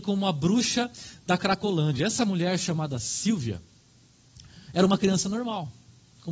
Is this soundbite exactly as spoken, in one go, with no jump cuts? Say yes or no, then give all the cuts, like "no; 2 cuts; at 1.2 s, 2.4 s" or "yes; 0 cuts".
yes; 0 cuts